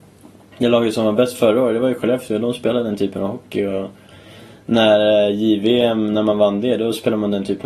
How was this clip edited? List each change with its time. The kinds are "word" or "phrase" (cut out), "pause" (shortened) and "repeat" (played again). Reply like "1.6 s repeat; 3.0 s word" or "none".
none